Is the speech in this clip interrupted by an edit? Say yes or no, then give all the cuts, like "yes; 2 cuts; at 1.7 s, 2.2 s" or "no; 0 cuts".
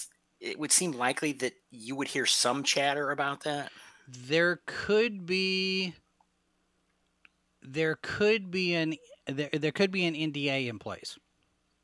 no; 0 cuts